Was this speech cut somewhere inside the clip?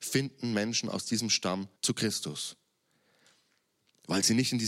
yes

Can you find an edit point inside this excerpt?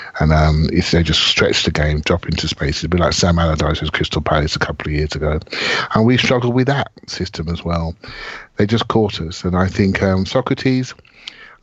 no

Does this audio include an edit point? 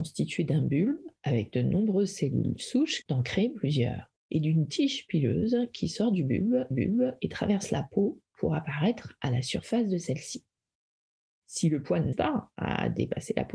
yes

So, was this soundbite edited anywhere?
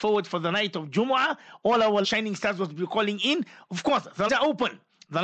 yes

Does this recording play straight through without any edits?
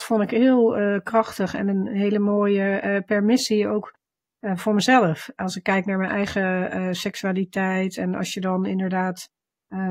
yes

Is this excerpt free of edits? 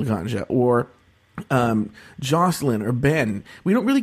yes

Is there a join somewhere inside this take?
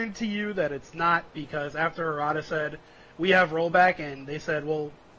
no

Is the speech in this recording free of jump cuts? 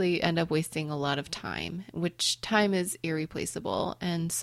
yes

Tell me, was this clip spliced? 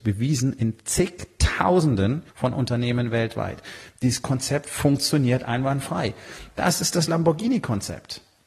yes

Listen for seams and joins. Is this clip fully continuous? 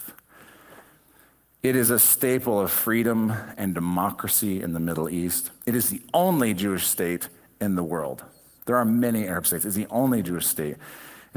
yes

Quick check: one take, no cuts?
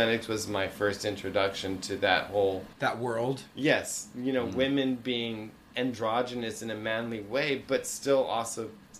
no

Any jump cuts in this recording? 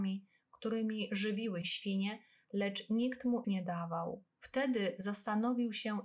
yes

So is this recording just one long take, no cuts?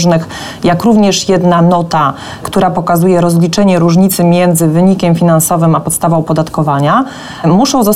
yes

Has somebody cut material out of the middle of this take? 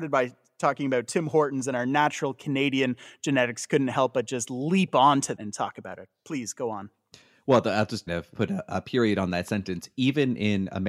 yes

